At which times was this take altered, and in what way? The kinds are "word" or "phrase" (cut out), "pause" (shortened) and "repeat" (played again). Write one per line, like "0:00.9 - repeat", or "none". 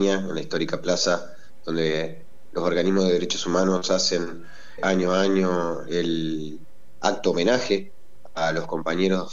0:04.8 - word